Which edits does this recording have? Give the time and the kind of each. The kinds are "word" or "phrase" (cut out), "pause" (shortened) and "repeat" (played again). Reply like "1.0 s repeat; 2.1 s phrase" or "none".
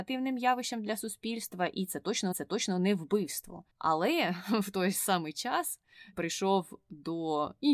2.3 s repeat; 3.7 s pause; 6.1 s word